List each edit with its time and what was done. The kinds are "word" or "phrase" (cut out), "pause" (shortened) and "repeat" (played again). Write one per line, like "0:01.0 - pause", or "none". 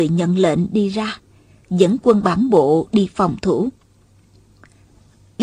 none